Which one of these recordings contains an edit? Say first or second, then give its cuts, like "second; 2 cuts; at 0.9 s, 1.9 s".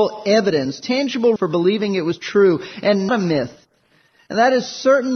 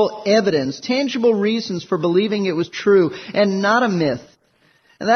first; 2 cuts; at 1.4 s, 3.1 s